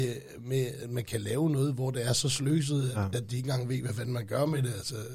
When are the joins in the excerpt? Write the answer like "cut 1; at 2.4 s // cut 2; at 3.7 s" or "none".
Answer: none